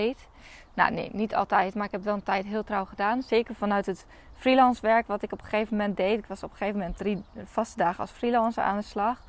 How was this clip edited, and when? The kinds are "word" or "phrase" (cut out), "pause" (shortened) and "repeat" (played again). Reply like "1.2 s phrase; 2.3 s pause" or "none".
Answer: 7.0 s word